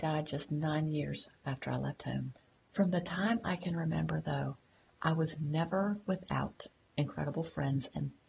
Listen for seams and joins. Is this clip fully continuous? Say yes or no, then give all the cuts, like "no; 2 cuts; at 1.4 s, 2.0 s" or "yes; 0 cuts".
yes; 0 cuts